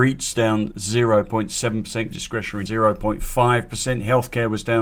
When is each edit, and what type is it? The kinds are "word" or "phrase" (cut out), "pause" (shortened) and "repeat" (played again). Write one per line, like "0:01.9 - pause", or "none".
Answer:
0:02.1 - word
0:02.7 - word